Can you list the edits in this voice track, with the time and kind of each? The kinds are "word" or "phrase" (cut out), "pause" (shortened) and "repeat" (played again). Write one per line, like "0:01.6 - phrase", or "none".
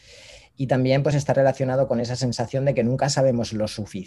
none